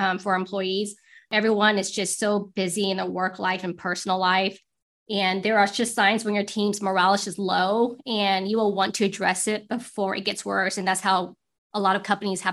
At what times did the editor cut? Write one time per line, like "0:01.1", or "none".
none